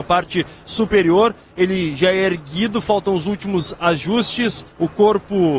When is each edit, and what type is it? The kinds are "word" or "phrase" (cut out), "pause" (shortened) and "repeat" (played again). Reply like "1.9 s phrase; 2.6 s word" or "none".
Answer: 4.7 s pause